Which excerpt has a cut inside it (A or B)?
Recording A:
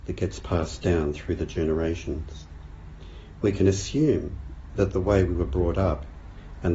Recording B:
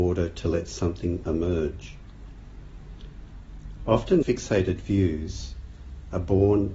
B